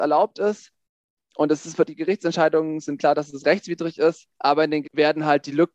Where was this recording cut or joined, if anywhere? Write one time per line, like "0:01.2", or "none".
0:01.9
0:03.0
0:04.3
0:04.8